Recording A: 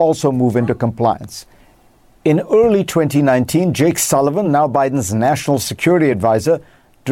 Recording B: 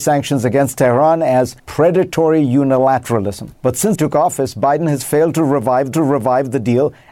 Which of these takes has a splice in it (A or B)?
B